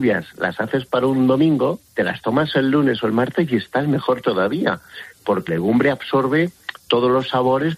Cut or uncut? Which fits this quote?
cut